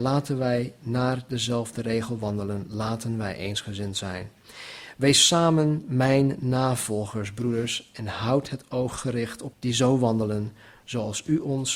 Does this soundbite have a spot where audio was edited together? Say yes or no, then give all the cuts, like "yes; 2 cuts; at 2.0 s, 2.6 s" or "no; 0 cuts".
yes; 1 cut; at 9.5 s